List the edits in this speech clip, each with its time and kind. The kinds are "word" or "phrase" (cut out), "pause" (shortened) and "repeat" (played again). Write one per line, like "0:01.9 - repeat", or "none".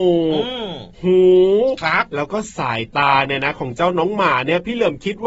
0:00.9 - pause